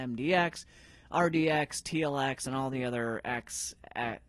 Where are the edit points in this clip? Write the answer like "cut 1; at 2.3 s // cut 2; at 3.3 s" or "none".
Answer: none